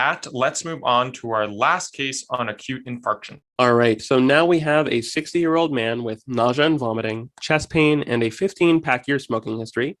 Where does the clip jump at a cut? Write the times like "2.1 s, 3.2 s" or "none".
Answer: 3.4 s